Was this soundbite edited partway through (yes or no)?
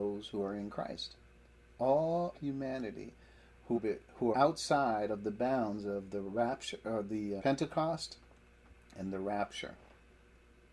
yes